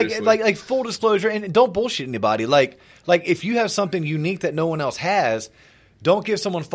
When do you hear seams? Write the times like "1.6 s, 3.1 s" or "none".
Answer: none